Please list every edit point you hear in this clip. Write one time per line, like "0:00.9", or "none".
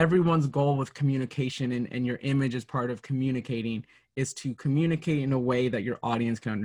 none